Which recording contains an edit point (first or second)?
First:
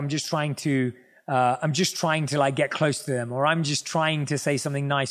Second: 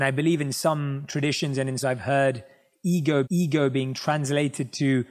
second